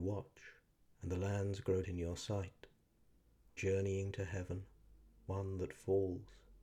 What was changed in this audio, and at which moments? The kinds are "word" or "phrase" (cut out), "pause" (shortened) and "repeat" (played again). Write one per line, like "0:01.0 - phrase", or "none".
0:01.8 - word
0:03.6 - word